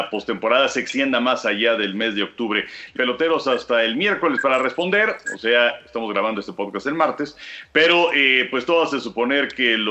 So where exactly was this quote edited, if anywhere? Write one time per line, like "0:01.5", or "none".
0:03.0